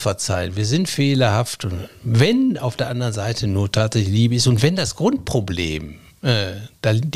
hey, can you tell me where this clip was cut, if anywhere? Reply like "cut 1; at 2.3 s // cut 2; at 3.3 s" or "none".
none